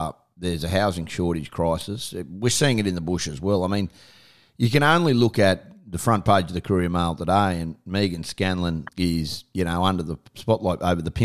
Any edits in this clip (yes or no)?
yes